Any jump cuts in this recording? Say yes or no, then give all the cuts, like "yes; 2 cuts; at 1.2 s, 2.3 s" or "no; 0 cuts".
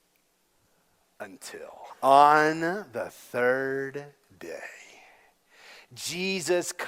yes; 1 cut; at 1.9 s